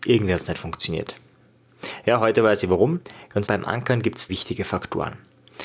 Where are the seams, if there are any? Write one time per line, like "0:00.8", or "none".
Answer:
0:03.4
0:04.3